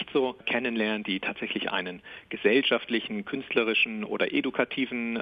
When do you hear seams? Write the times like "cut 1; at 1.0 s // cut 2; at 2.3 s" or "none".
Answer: none